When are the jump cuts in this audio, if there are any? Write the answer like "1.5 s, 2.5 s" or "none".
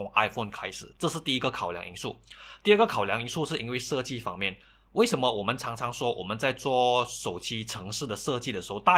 1.0 s